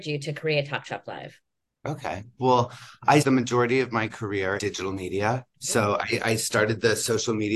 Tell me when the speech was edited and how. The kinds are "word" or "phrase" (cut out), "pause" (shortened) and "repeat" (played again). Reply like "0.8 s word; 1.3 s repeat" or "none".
3.2 s word; 4.6 s word; 5.5 s pause